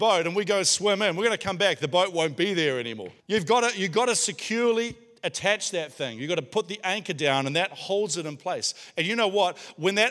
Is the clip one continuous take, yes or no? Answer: no